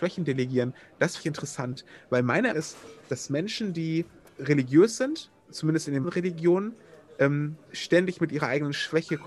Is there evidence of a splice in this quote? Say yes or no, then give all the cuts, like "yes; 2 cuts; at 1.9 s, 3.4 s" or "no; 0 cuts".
yes; 6 cuts; at 1.2 s, 2.5 s, 4.2 s, 5.4 s, 6.0 s, 7.7 s